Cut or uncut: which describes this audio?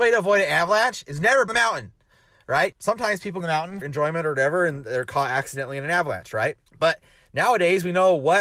cut